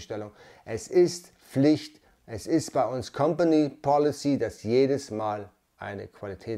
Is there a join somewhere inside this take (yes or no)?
no